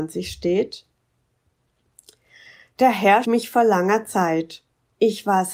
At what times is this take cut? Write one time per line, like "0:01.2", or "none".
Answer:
0:03.2